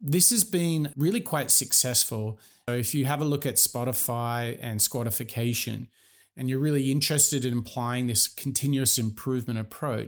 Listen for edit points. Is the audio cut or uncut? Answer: cut